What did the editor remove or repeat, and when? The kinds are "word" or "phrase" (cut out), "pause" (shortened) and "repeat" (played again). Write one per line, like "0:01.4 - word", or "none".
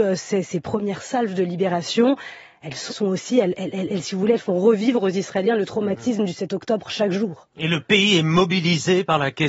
0:02.9 - phrase